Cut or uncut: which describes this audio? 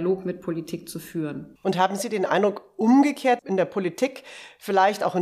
cut